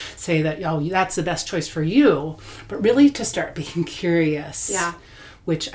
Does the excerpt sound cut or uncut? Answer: uncut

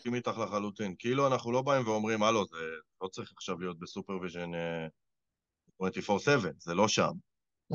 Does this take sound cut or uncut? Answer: uncut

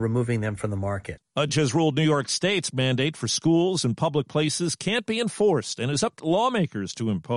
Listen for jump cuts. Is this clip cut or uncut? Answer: cut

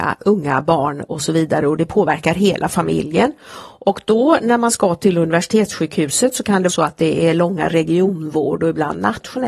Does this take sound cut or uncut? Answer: cut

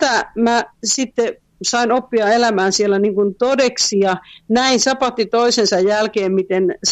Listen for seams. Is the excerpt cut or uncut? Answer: uncut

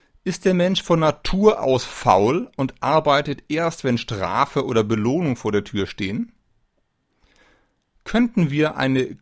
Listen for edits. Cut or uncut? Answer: uncut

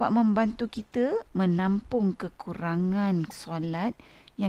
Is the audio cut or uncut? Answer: cut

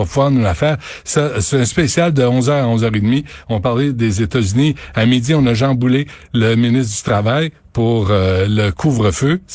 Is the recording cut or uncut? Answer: uncut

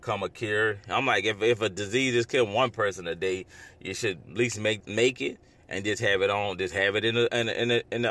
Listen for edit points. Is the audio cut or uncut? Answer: cut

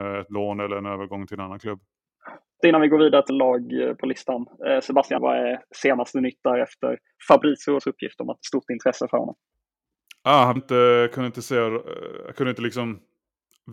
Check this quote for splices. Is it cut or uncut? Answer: cut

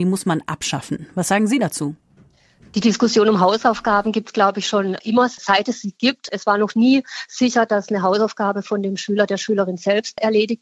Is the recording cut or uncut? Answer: uncut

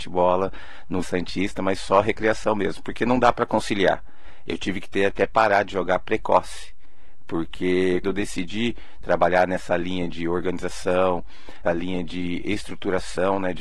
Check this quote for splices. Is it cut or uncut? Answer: cut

